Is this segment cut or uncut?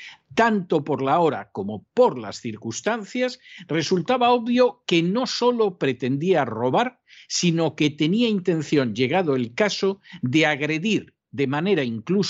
uncut